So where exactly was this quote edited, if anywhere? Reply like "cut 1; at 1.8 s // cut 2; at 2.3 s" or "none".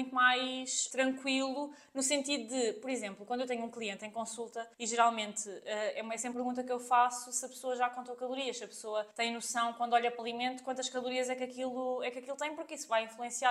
cut 1; at 4.7 s // cut 2; at 6.3 s // cut 3; at 9.1 s // cut 4; at 10.2 s